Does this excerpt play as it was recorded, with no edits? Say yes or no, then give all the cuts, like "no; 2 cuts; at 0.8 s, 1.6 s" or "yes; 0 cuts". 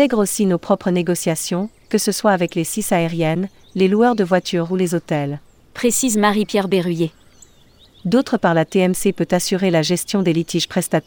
yes; 0 cuts